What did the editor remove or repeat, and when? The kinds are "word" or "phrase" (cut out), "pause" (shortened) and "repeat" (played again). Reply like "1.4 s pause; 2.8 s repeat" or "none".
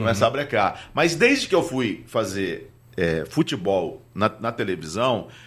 none